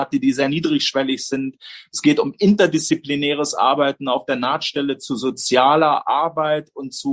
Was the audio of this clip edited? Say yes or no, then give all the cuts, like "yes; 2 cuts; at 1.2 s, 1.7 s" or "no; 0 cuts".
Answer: no; 0 cuts